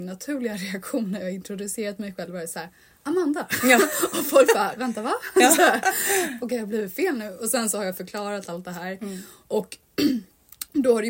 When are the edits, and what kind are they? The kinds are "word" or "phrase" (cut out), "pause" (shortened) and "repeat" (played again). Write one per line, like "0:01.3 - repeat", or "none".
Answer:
none